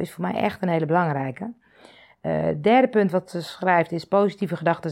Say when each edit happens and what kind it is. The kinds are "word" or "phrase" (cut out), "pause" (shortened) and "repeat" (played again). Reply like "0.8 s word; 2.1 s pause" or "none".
none